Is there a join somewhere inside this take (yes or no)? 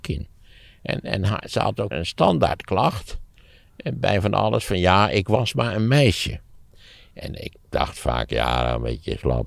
yes